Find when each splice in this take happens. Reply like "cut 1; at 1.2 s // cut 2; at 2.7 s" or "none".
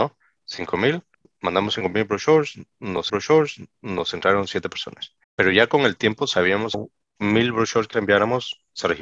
cut 1; at 1.1 s // cut 2; at 3.1 s // cut 3; at 5.2 s // cut 4; at 6.7 s // cut 5; at 7.9 s